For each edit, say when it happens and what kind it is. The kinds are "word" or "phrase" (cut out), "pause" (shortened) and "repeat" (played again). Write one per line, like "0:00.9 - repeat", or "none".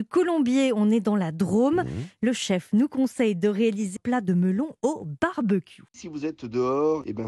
0:04.0 - word
0:05.9 - pause